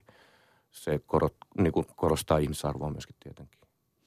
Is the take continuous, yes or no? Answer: yes